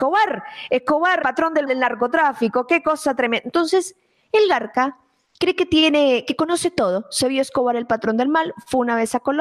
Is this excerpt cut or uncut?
cut